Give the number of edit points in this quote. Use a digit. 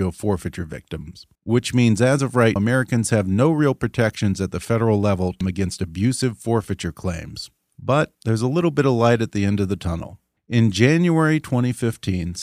5